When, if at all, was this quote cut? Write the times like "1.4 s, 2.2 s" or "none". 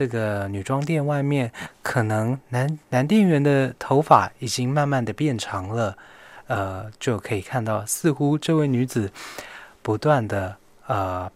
2.8 s